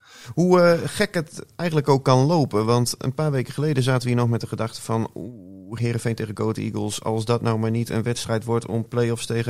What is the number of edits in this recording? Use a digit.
0